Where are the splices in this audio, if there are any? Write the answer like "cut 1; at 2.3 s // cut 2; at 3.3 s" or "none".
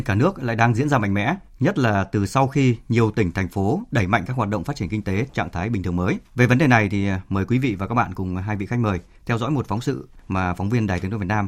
cut 1; at 5.3 s // cut 2; at 6.2 s